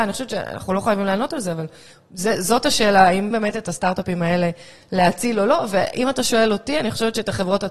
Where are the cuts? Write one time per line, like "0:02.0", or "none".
0:03.3